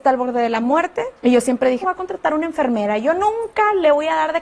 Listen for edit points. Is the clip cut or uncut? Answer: cut